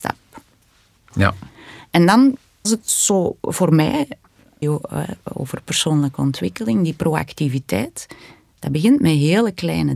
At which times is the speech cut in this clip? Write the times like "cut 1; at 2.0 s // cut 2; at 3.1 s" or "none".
cut 1; at 2.6 s // cut 2; at 4.6 s